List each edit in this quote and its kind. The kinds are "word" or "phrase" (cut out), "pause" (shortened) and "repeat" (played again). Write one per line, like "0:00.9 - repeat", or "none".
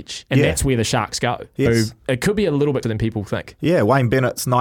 0:01.7 - word
0:02.8 - word